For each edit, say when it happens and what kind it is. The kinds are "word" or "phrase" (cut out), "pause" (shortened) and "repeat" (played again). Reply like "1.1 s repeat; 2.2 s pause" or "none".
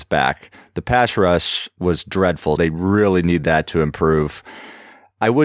2.6 s word